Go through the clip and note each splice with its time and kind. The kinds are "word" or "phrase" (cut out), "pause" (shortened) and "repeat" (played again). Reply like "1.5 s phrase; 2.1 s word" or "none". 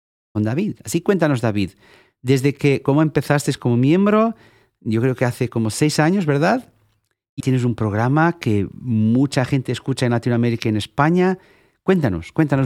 7.4 s word